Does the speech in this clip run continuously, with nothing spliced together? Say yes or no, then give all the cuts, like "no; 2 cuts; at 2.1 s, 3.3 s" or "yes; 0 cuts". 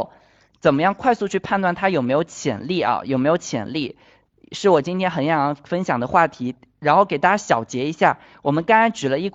yes; 0 cuts